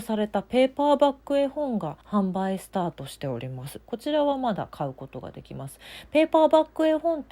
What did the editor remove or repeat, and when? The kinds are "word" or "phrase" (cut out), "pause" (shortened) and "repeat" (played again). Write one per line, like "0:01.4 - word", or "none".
0:02.0 - pause